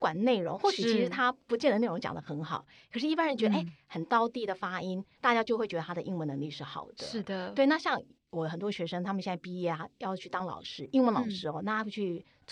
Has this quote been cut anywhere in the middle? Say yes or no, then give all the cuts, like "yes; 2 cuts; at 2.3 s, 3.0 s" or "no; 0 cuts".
no; 0 cuts